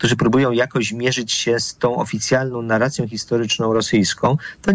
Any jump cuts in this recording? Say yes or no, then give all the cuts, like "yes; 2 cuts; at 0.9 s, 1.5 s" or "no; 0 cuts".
no; 0 cuts